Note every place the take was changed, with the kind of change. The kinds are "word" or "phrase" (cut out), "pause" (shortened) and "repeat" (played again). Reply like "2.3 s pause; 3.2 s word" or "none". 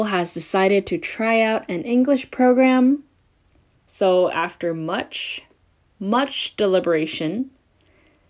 none